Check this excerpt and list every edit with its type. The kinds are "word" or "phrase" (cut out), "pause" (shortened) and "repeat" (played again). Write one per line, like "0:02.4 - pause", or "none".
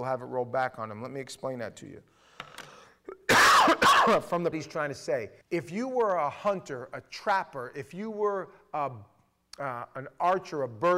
0:04.5 - phrase
0:05.4 - pause